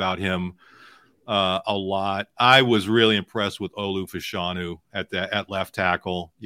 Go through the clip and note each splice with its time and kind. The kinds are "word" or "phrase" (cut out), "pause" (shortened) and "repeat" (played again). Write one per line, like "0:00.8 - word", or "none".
none